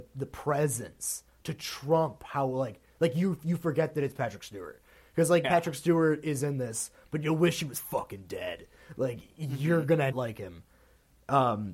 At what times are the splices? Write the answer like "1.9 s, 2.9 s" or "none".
5.4 s, 10.1 s